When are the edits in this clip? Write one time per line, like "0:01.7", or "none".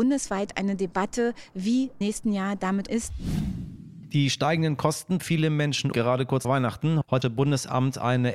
0:02.0
0:02.9
0:05.2
0:05.9
0:06.4
0:07.2